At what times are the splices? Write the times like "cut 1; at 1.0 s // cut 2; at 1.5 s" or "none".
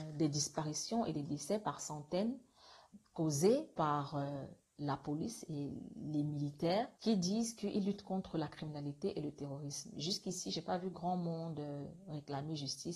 cut 1; at 3.7 s // cut 2; at 6.9 s